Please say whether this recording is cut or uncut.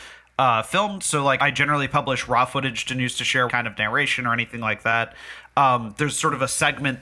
cut